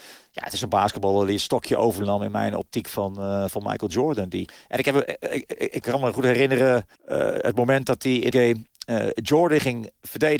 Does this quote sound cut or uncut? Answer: cut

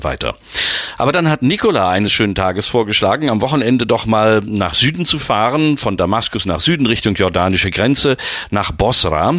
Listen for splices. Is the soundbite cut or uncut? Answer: uncut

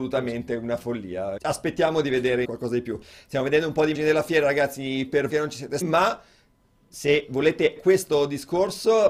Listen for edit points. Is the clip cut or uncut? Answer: cut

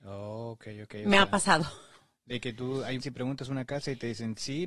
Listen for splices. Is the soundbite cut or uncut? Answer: cut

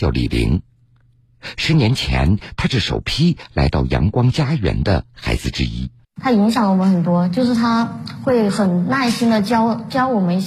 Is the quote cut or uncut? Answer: cut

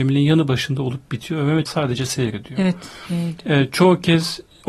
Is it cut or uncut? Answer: cut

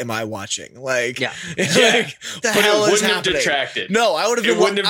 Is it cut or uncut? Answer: cut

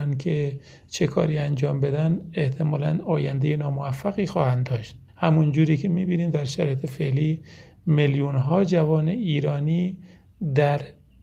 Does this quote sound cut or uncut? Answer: cut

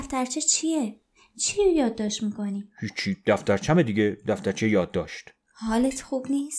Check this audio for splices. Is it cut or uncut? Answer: uncut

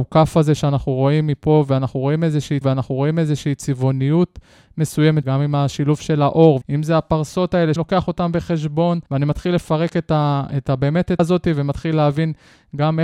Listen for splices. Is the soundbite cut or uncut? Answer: cut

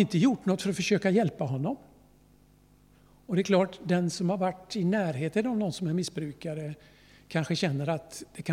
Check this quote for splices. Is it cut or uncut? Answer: uncut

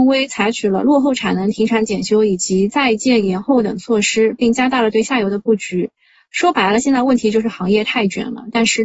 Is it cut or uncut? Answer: uncut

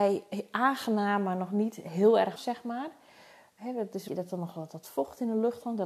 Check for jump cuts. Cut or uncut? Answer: cut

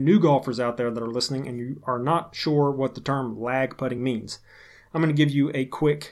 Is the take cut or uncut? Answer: uncut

